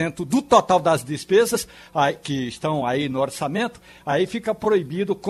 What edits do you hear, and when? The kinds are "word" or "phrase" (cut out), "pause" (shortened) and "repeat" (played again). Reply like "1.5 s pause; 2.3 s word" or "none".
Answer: none